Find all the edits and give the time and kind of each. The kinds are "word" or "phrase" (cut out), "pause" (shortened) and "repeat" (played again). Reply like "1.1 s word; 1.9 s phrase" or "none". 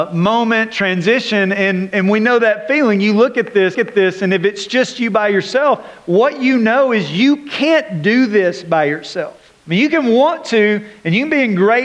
1.9 s word; 3.7 s repeat; 9.6 s pause